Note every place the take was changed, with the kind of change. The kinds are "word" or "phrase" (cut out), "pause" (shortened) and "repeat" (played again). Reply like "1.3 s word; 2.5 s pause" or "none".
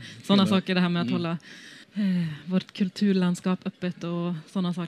1.8 s pause